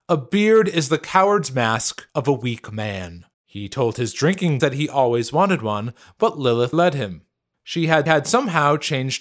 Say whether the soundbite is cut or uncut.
cut